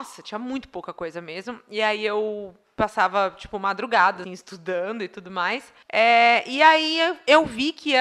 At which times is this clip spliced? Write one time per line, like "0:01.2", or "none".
0:04.2
0:05.8